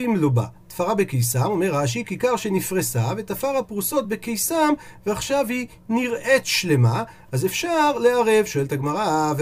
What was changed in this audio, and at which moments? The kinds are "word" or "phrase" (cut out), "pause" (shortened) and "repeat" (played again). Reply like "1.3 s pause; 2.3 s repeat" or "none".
none